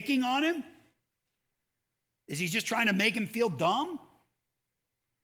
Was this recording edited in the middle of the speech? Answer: no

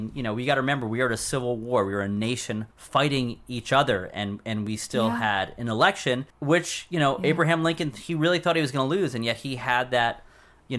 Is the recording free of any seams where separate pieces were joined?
no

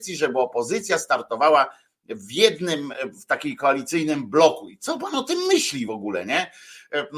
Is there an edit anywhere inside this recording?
no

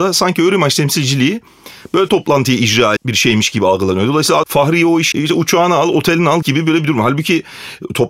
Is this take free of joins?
no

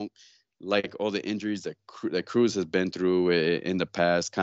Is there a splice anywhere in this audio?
no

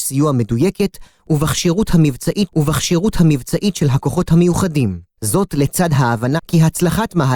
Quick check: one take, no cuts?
no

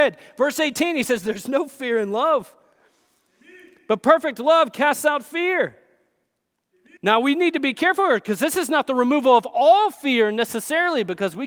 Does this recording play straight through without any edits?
no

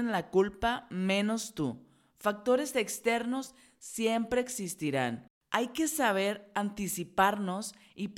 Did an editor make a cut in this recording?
no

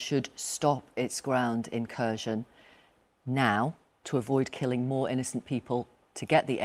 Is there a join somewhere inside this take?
no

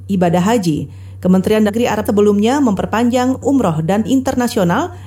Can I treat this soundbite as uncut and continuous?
no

